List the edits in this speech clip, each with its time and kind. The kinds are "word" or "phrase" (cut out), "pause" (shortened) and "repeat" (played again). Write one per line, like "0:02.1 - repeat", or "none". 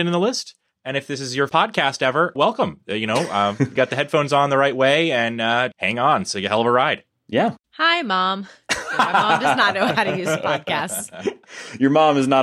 0:01.5 - word
0:02.4 - word
0:03.8 - phrase
0:05.7 - word
0:07.6 - pause